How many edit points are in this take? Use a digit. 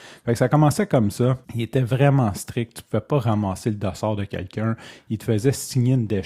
1